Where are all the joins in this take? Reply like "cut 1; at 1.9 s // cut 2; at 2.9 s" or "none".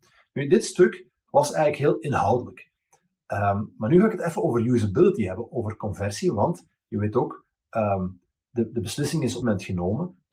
cut 1; at 5.5 s // cut 2; at 9.4 s